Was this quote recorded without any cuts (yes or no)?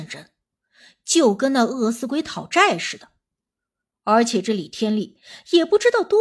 yes